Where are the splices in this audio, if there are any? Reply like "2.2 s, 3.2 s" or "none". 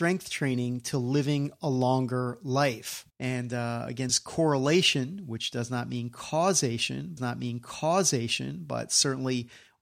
3.1 s, 4.1 s, 7.2 s